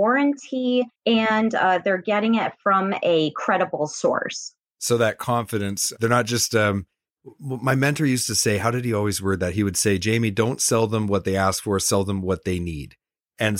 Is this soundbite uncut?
no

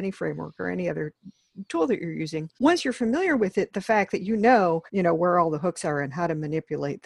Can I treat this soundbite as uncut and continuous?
no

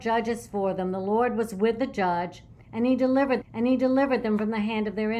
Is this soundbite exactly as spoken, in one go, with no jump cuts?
no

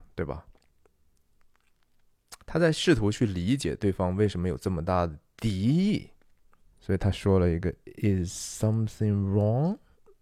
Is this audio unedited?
no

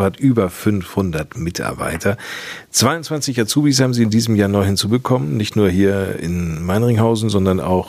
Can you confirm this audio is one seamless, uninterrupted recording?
yes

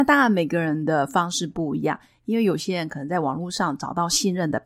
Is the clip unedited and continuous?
yes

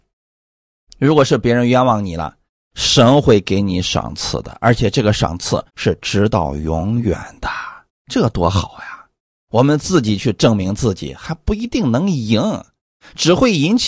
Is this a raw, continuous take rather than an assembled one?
no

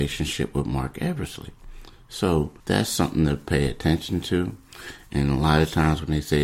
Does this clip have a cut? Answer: yes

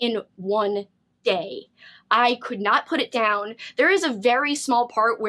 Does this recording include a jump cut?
no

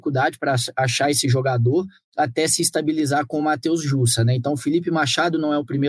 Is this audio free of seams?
yes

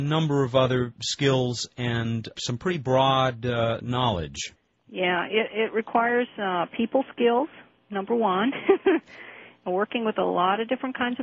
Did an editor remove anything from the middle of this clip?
no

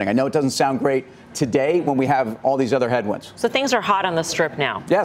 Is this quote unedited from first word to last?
yes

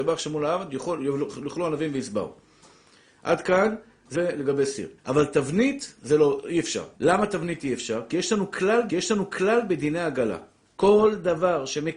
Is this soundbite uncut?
no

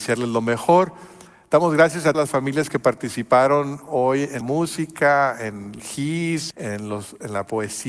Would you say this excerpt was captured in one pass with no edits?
no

